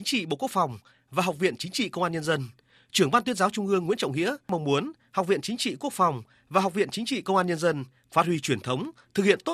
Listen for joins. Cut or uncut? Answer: uncut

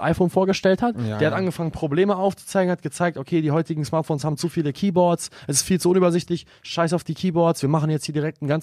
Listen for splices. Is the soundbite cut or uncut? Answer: uncut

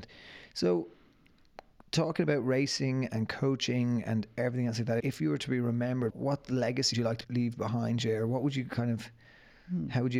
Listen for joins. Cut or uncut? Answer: cut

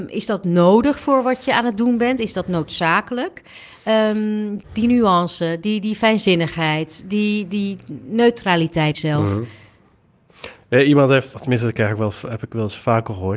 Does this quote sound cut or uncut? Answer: cut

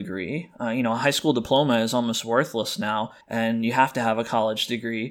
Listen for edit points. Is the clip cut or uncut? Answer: cut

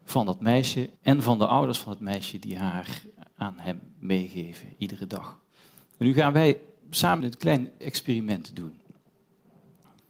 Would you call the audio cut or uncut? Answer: cut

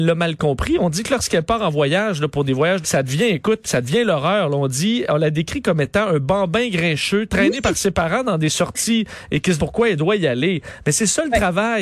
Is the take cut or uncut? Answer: cut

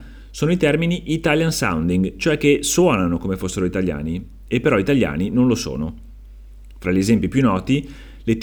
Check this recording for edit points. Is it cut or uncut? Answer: uncut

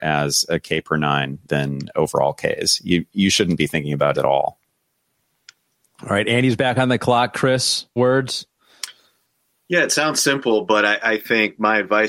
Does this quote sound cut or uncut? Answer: cut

